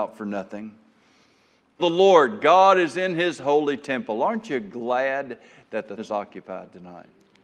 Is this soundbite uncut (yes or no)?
no